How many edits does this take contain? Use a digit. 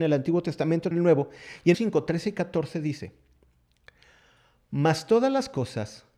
2